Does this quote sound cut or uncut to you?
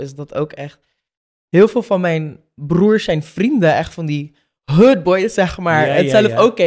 uncut